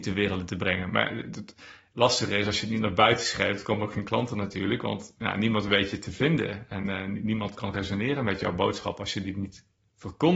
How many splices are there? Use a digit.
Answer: 0